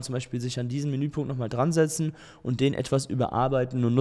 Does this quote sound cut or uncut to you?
uncut